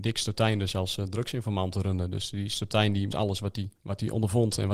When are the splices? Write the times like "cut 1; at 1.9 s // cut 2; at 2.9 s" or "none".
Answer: cut 1; at 3.1 s // cut 2; at 3.8 s